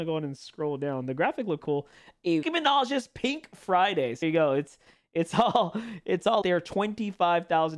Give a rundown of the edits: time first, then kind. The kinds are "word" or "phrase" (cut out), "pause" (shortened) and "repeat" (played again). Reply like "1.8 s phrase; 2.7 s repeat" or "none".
1.6 s word; 2.4 s word; 4.2 s word; 6.4 s word

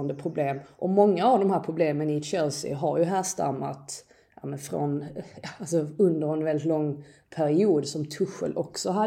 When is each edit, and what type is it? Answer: none

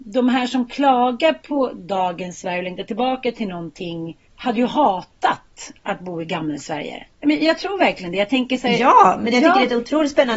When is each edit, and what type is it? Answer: 4.2 s pause; 7.1 s pause

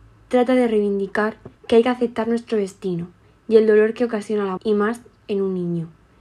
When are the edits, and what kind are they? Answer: 1.6 s pause; 4.6 s word

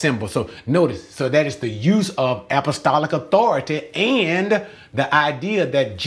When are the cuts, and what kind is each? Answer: none

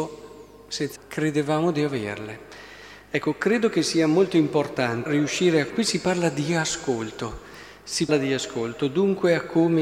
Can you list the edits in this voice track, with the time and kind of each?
1.0 s word; 5.1 s word; 5.7 s word; 8.1 s word

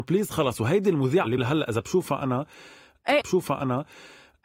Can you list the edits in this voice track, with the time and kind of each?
1.4 s word; 3.2 s repeat

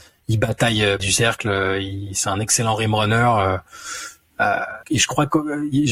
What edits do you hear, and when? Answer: 1.0 s word; 4.8 s word

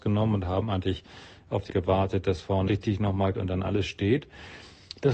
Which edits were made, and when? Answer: 1.7 s word; 2.7 s word; 3.3 s word

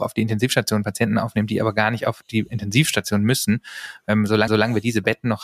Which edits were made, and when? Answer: 4.5 s repeat

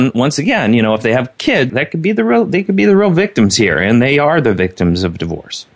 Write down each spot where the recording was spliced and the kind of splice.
1.7 s word

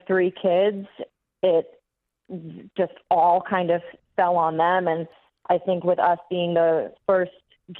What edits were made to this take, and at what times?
none

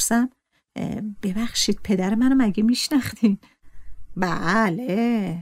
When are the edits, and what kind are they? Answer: none

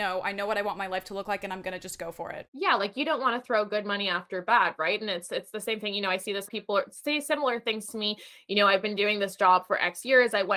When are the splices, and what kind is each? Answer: 6.5 s phrase

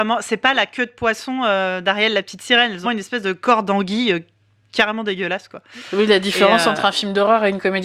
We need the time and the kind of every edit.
2.8 s word

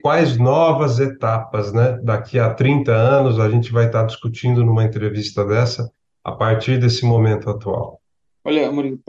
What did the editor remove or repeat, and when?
none

